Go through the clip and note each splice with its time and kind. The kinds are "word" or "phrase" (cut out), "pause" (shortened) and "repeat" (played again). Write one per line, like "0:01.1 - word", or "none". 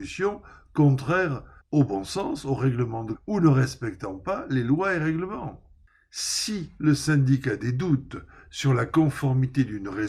0:01.6 - pause
0:03.1 - word